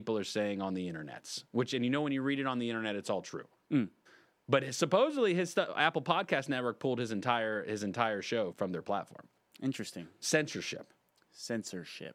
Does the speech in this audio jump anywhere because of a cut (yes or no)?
yes